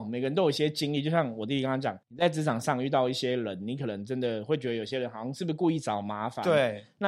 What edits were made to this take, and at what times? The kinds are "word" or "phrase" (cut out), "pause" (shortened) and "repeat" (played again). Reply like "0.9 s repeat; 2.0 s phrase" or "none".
2.0 s pause